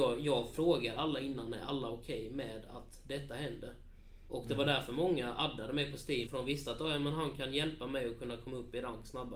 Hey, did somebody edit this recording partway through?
yes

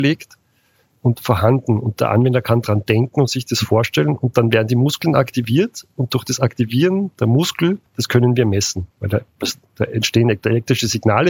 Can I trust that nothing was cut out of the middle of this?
no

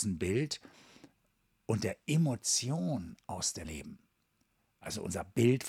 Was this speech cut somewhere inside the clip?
yes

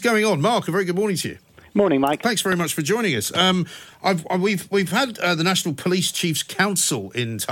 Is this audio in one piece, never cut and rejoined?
yes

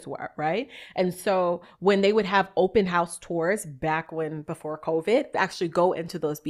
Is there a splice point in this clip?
yes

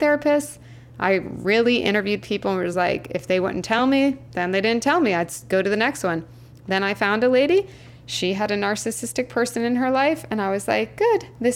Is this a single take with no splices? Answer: yes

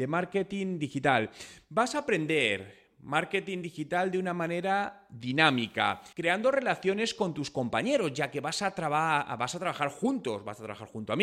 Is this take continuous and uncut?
no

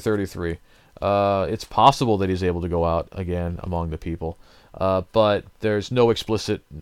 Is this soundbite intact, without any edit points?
yes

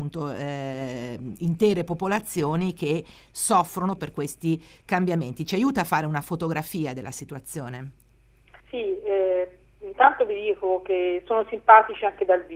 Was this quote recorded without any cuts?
no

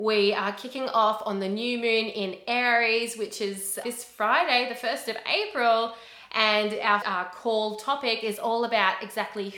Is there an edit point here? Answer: yes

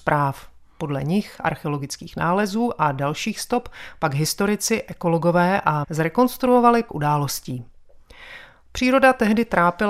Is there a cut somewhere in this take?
yes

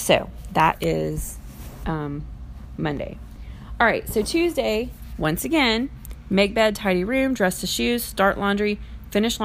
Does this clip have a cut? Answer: no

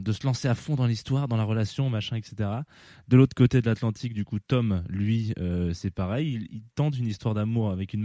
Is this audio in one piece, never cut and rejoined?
yes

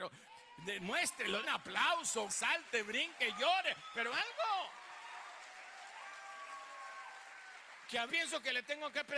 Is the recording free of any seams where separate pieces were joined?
no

